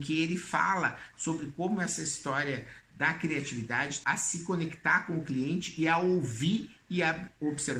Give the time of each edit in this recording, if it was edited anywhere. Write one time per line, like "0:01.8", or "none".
0:04.0

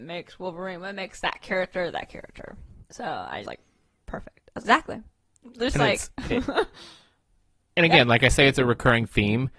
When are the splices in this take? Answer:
0:02.9
0:03.4
0:04.6

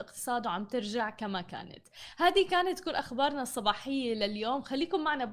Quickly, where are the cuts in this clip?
none

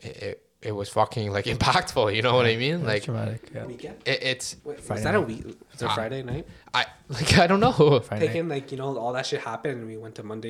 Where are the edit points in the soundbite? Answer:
0:03.6
0:04.6

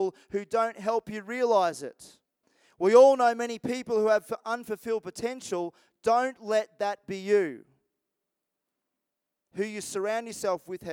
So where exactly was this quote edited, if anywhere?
none

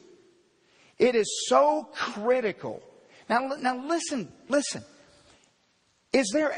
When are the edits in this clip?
none

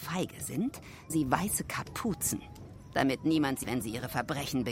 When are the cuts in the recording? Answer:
0:01.1
0:03.6

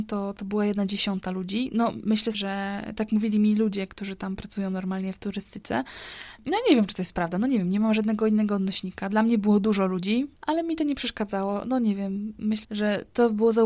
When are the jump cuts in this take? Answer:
0:02.3
0:12.6

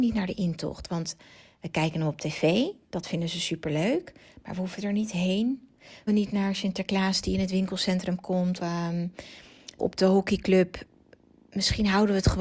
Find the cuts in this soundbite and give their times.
0:06.1
0:08.6
0:09.8

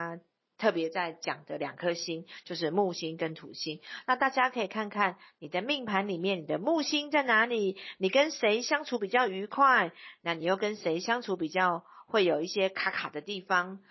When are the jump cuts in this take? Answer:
none

